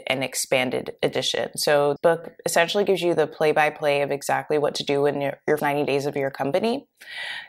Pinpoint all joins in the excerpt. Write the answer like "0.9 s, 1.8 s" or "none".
2.0 s, 5.6 s